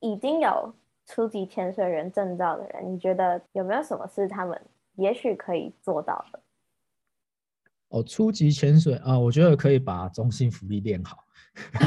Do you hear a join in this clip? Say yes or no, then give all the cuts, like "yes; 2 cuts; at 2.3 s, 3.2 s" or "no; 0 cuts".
yes; 1 cut; at 3.5 s